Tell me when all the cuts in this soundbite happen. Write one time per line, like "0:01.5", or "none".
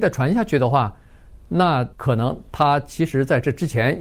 0:01.9